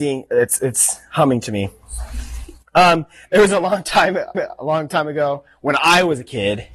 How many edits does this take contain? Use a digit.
1